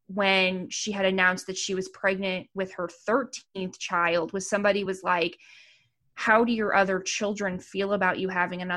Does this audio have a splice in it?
no; 0 cuts

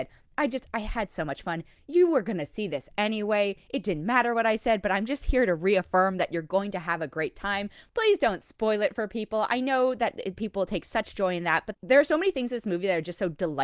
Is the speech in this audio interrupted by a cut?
no; 0 cuts

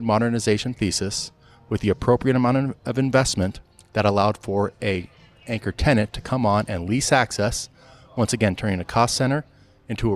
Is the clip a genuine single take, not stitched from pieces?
yes; 0 cuts

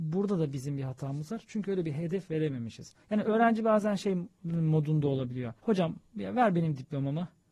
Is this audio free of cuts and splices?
no; 2 cuts; at 3.0 s, 5.6 s

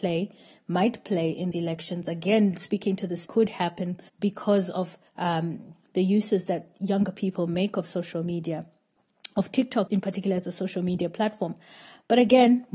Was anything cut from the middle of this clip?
yes; 5 cuts; at 1.5 s, 3.3 s, 4.1 s, 5.1 s, 9.9 s

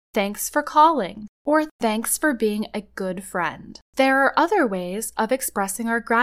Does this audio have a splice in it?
yes; 2 cuts; at 1.3 s, 3.9 s

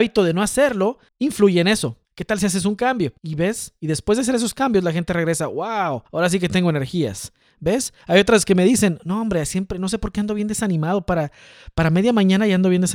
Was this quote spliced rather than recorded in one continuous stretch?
yes; 5 cuts; at 1.1 s, 2.0 s, 3.2 s, 6.1 s, 8.0 s

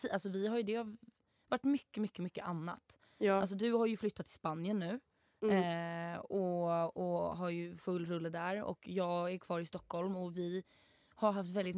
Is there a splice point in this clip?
no; 0 cuts

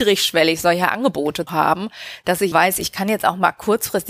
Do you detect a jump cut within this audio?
yes; 2 cuts; at 1.5 s, 2.5 s

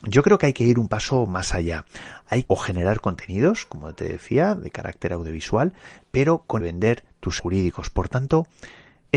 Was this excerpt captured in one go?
no; 3 cuts; at 2.5 s, 6.6 s, 7.4 s

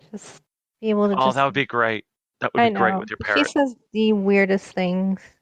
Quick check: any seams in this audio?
no; 0 cuts

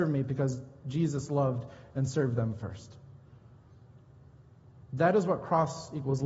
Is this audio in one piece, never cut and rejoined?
yes; 0 cuts

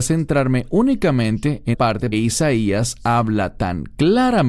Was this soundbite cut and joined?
yes; 2 cuts; at 1.7 s, 2.1 s

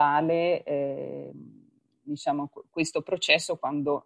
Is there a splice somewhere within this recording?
no; 0 cuts

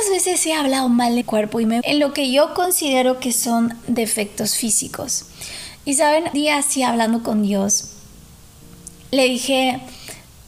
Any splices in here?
yes; 3 cuts; at 1.2 s, 1.8 s, 6.3 s

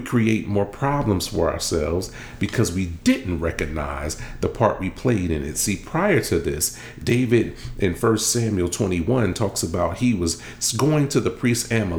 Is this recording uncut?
yes; 0 cuts

